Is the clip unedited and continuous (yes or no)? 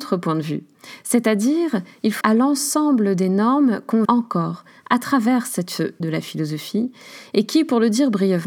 no